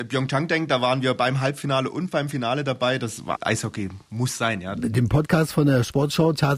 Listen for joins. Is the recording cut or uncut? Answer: cut